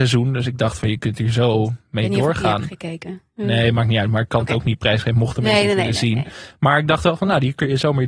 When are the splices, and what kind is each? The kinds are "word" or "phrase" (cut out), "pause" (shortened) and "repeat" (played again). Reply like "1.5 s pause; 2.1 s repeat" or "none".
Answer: none